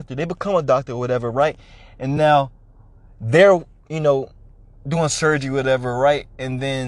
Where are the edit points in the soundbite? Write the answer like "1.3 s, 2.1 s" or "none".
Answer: none